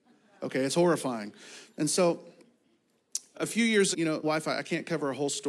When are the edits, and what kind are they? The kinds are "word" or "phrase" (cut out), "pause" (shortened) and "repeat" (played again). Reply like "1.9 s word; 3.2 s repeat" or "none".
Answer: 3.3 s word; 3.9 s word; 4.2 s word